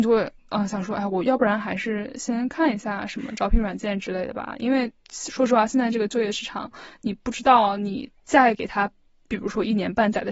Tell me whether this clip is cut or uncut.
cut